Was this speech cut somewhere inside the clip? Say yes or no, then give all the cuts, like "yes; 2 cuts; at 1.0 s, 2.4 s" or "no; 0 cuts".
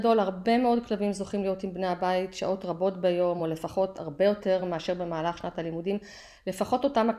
no; 0 cuts